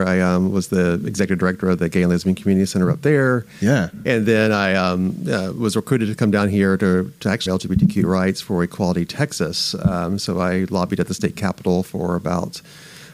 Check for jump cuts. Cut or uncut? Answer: cut